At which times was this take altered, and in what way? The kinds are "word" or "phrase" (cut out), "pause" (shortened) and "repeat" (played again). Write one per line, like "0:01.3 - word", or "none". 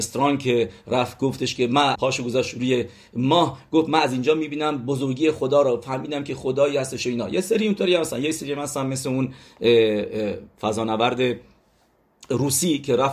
0:02.0 - word

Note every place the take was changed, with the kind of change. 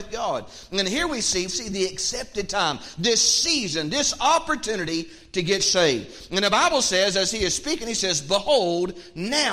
0:01.5 - word

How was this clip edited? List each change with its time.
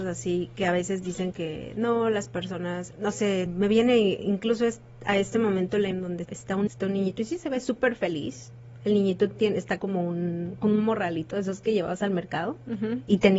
0:01.3 - word
0:02.9 - word
0:03.5 - word
0:05.9 - word
0:06.2 - word
0:06.7 - word
0:09.8 - word
0:10.6 - word

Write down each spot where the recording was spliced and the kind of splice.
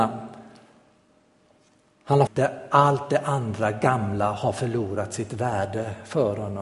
0:02.3 - phrase

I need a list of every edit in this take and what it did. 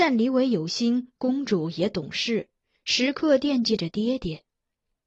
none

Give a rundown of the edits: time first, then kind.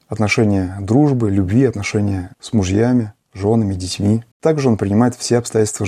0:04.3 - pause

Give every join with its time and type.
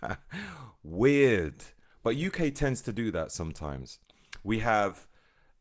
none

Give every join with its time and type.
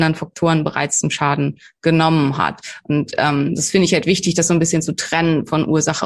none

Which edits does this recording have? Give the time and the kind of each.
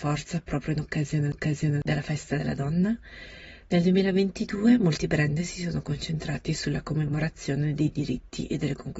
0:01.3 - repeat

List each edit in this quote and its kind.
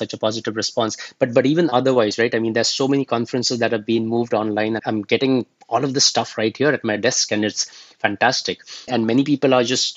0:04.8 - word
0:08.9 - word

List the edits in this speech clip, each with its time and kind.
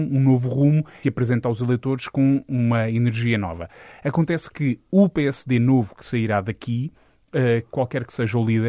0:01.0 - phrase

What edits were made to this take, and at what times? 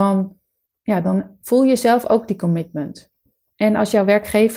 none

